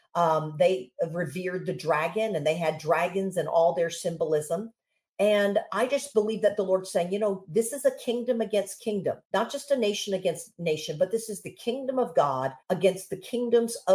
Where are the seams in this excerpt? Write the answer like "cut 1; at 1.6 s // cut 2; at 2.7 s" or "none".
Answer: cut 1; at 9.2 s // cut 2; at 12.6 s